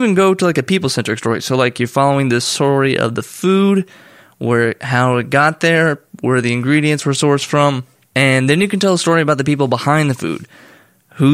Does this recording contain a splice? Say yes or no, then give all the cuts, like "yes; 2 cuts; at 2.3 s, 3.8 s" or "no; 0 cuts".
no; 0 cuts